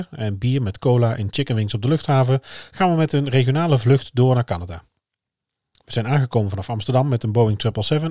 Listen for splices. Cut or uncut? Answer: uncut